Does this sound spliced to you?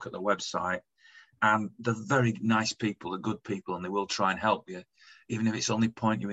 no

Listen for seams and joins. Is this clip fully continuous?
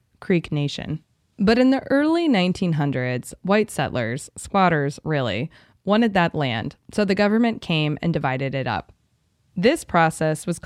yes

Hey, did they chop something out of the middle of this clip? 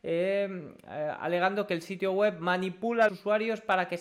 yes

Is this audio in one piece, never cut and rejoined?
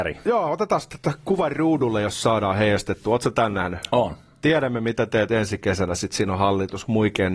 yes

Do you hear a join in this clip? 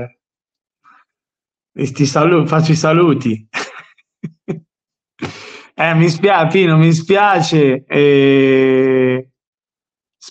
no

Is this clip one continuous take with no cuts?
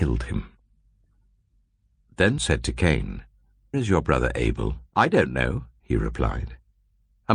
no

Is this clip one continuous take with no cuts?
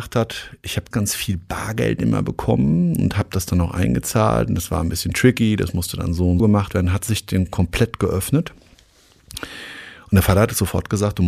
no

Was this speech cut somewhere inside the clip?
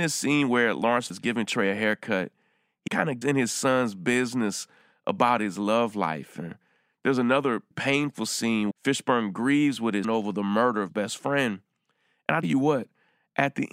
yes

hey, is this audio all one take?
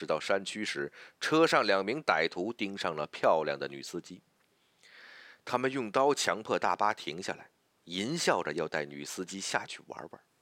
yes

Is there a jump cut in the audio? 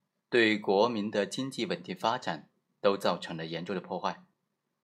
no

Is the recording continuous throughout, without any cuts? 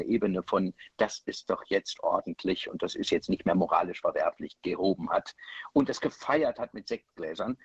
no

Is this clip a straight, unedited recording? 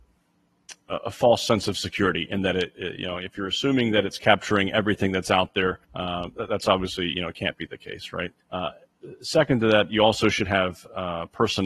no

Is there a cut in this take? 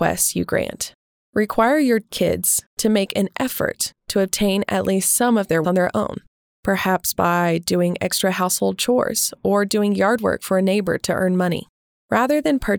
yes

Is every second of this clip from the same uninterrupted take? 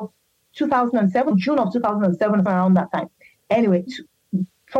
no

